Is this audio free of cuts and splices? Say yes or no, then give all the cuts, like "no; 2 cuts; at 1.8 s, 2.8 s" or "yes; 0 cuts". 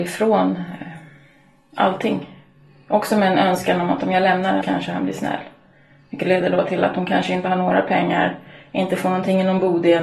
no; 1 cut; at 4.6 s